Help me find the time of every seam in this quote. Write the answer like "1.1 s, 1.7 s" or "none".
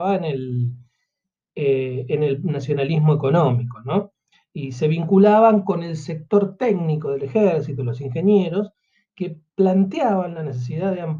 none